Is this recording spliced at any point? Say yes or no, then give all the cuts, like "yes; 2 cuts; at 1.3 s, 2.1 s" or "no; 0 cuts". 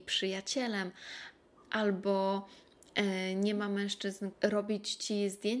yes; 1 cut; at 4.3 s